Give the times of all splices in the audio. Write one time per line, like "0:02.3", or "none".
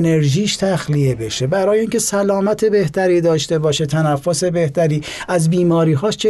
none